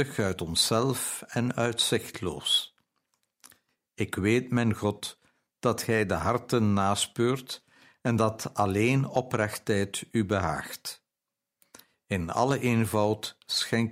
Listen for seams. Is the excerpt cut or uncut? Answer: uncut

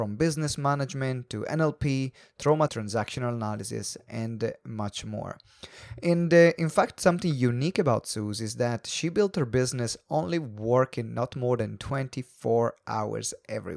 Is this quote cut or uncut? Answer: cut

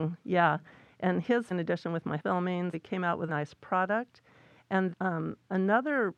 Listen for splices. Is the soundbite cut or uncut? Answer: cut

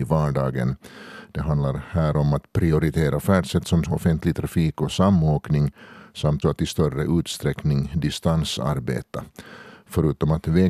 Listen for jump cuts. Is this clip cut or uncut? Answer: cut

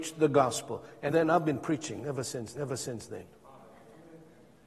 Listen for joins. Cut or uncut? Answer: cut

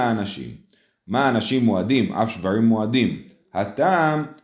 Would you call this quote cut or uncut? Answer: uncut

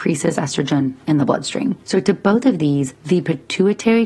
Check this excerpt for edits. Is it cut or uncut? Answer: uncut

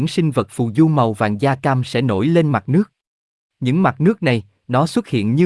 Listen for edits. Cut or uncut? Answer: uncut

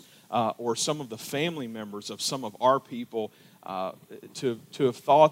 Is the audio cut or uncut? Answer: uncut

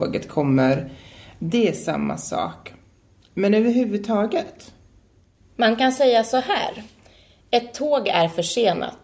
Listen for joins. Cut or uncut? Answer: uncut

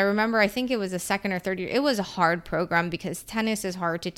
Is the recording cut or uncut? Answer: uncut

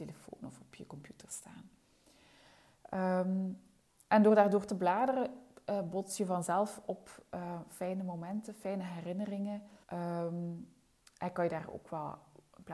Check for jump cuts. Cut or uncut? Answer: cut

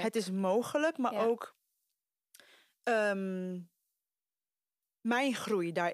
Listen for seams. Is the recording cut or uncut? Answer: uncut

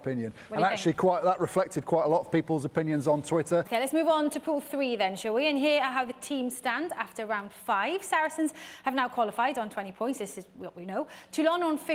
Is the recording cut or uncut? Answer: uncut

